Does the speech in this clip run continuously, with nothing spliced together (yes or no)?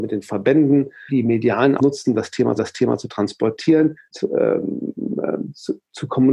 no